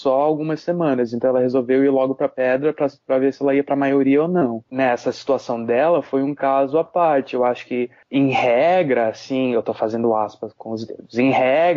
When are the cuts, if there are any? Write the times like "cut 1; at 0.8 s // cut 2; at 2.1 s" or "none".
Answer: cut 1; at 10.6 s